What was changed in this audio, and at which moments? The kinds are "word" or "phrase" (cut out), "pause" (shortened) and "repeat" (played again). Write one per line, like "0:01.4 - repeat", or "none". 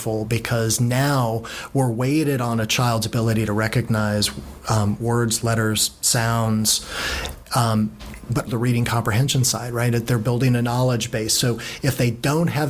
0:08.5 - word